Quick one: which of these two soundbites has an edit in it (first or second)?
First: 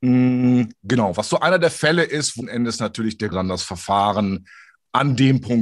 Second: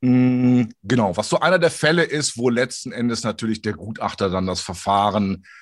first